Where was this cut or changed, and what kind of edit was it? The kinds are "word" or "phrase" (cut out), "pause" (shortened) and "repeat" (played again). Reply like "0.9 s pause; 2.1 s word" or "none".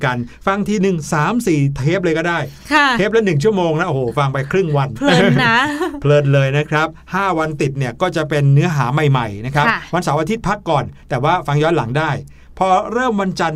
none